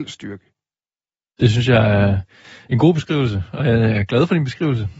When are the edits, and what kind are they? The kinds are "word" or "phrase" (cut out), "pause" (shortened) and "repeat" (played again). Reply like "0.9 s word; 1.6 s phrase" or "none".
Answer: none